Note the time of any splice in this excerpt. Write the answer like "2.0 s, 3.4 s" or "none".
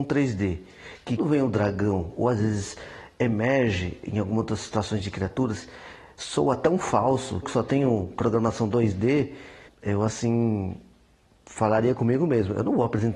1.2 s, 7.4 s, 9.7 s